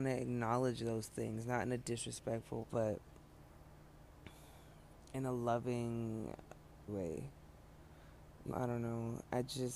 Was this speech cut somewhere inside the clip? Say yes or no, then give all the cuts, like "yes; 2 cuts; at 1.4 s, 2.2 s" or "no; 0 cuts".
yes; 3 cuts; at 2.6 s, 6.9 s, 8.5 s